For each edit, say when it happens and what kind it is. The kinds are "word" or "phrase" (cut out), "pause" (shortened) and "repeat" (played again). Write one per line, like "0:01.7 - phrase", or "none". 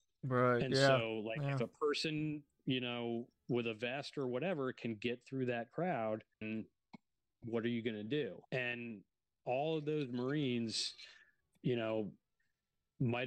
0:06.3 - pause
0:08.4 - pause